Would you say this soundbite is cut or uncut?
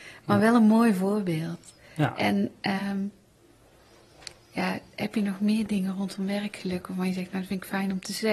uncut